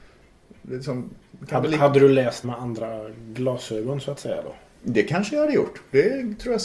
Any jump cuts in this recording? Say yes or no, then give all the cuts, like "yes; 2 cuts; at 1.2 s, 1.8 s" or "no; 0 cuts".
yes; 1 cut; at 2.4 s